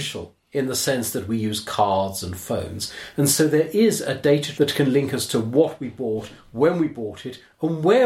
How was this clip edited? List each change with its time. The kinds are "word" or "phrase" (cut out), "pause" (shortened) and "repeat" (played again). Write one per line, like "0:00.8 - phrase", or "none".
0:04.5 - word